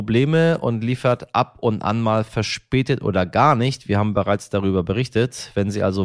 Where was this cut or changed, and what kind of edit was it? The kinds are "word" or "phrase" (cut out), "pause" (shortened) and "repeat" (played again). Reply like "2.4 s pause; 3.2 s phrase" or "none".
none

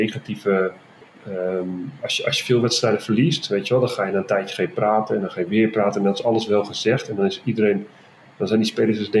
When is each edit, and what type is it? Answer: 1.0 s pause

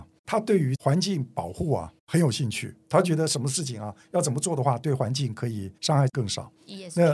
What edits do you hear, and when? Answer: 5.8 s pause

